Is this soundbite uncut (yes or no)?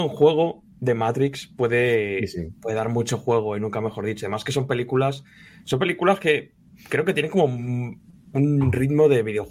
yes